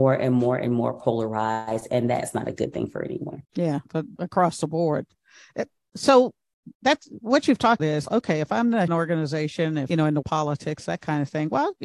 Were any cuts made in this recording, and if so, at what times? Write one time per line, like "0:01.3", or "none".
0:03.4
0:04.2
0:06.7
0:07.8
0:08.9
0:09.9
0:10.2